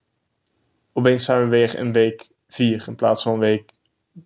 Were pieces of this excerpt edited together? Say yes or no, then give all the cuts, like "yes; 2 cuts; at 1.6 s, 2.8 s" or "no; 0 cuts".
no; 0 cuts